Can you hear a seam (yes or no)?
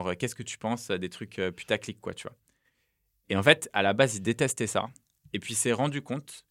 no